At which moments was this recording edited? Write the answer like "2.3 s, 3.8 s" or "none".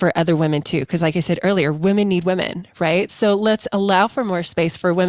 none